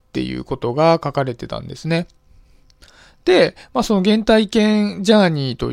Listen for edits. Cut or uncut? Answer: uncut